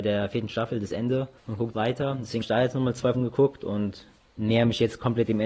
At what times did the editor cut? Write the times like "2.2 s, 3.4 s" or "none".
1.4 s, 1.7 s, 2.4 s, 3.1 s, 4.3 s

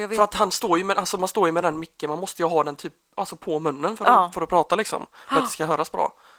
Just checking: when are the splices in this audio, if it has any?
none

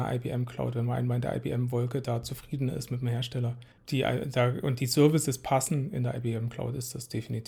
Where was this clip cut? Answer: 3.7 s

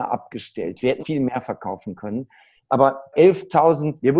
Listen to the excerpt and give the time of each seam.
1.0 s, 3.1 s

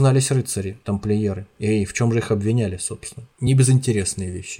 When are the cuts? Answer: none

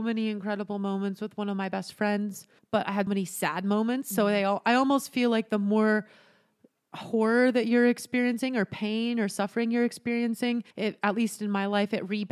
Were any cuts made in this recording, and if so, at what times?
2.6 s, 3.1 s, 10.7 s

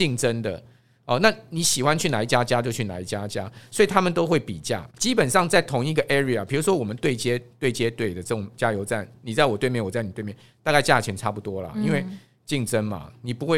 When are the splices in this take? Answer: 4.9 s

